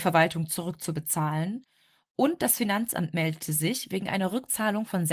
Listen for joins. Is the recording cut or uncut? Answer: uncut